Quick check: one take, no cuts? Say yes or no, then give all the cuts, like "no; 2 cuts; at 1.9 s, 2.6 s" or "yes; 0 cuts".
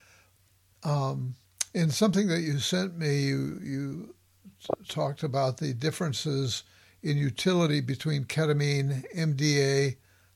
yes; 0 cuts